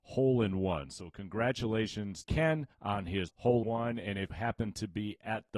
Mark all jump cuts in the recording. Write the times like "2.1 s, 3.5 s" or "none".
2.2 s, 2.7 s, 3.3 s, 3.6 s, 4.3 s